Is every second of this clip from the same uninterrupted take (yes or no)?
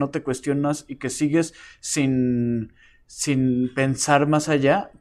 yes